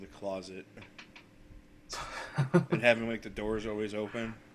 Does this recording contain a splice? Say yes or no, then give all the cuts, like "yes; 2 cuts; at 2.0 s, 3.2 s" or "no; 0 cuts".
no; 0 cuts